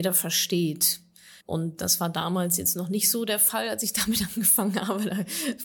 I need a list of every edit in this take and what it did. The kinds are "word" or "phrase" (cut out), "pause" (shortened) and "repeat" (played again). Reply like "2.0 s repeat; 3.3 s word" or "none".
1.4 s pause